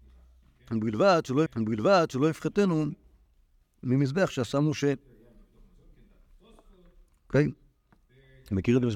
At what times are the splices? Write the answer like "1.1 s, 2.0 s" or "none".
1.5 s